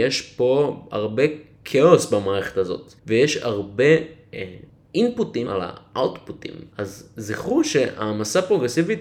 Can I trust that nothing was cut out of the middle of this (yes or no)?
no